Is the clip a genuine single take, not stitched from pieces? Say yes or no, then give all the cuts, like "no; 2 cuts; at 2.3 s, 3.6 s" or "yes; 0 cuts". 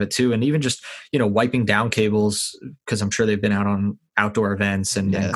yes; 0 cuts